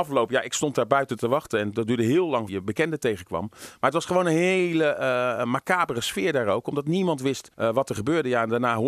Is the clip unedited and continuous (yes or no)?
no